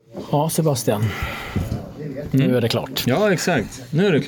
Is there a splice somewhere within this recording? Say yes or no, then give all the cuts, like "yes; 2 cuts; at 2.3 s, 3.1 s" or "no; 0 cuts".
no; 0 cuts